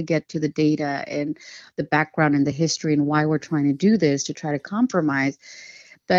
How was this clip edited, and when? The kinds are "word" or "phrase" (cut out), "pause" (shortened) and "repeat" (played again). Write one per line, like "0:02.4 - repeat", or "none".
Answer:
none

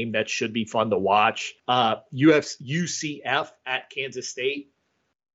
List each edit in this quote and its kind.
0:01.6 - pause

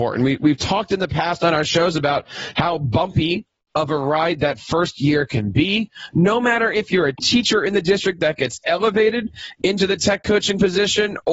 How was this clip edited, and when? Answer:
none

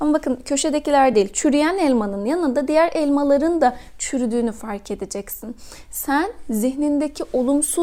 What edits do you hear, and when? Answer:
none

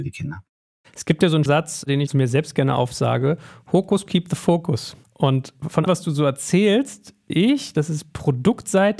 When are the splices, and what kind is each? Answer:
0:01.5 - word
0:04.1 - word
0:05.9 - word
0:07.3 - word

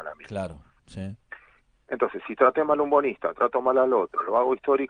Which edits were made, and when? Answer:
none

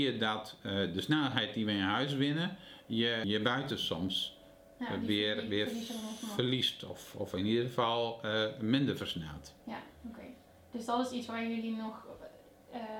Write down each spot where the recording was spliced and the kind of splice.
0:09.9 - pause

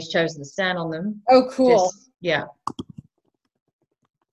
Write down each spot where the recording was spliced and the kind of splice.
0:02.1 - pause

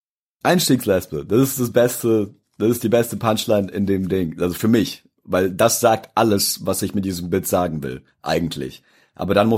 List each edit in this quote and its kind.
none

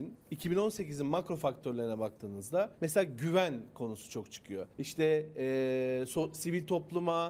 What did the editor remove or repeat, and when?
0:02.7 - pause
0:04.7 - pause

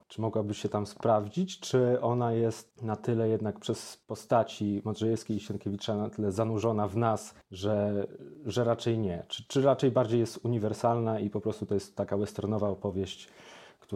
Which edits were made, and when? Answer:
0:04.0 - pause
0:09.5 - word

